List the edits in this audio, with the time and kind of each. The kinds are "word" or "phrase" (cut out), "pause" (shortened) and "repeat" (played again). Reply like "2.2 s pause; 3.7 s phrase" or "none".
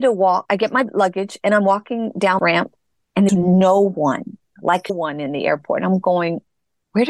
2.4 s word; 3.3 s word; 4.6 s word; 4.9 s word